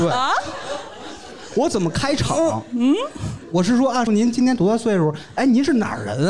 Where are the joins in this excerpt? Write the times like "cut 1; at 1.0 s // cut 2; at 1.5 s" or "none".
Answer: cut 1; at 4.1 s